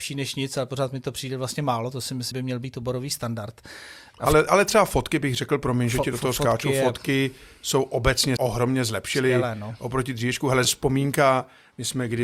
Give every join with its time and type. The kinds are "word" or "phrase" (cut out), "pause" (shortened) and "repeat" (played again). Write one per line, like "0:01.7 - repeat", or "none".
0:02.3 - word
0:08.4 - word
0:10.6 - word

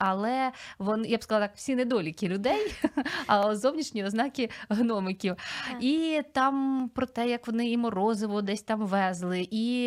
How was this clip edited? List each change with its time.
none

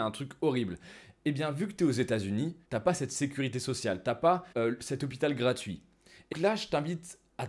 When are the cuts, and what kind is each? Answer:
0:02.6 - pause
0:04.5 - pause
0:06.3 - word

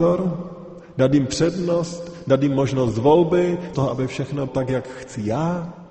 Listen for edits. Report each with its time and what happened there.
0:03.7 - word
0:04.5 - word

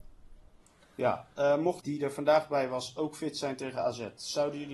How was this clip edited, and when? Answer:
0:01.8 - phrase

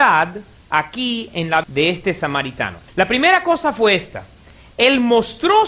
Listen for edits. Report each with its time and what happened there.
0:01.6 - word
0:02.9 - pause

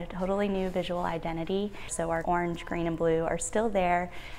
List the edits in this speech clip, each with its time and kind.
0:02.2 - phrase

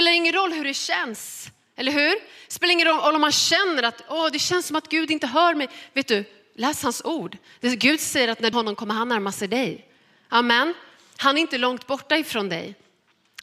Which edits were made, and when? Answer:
0:08.5 - phrase

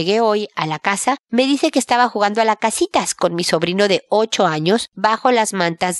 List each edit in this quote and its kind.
none

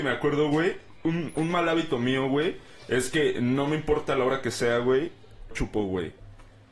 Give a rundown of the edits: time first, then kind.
0:01.3 - word
0:05.5 - word

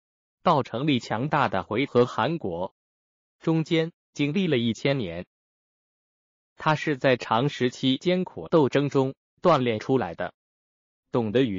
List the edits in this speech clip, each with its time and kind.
none

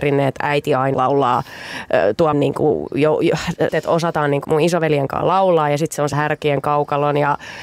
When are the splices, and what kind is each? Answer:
0:00.9 - word
0:02.3 - word
0:03.7 - word
0:04.4 - word
0:06.1 - word

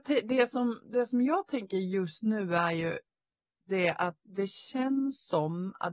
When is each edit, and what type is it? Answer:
none

